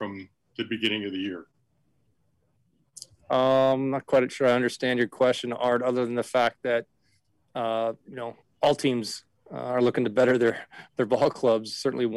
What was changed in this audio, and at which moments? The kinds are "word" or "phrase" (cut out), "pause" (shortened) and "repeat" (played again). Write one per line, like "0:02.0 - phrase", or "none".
none